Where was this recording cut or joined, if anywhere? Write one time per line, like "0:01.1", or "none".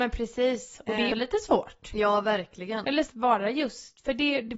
0:01.1
0:03.1